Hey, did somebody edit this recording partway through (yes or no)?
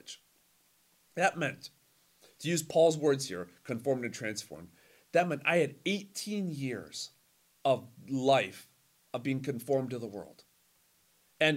no